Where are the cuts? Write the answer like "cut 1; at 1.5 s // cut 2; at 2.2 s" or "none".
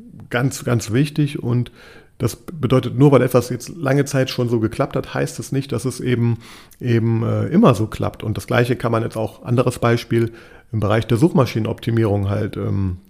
none